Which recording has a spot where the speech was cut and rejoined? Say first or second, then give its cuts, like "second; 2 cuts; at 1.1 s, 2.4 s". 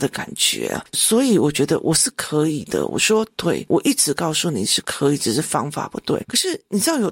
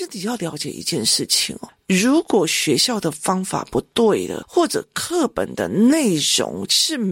first; 1 cut; at 3.7 s